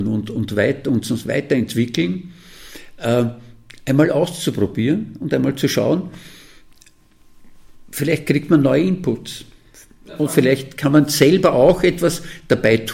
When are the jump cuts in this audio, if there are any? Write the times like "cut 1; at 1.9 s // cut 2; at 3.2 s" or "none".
none

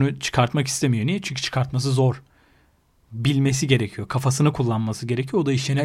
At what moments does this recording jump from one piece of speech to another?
none

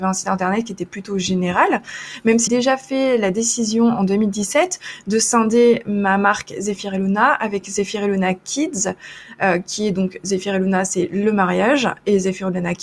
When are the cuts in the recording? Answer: cut 1; at 2.5 s

